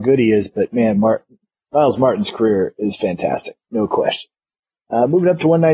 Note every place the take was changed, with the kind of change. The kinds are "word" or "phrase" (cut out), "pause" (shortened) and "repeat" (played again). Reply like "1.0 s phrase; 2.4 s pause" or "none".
none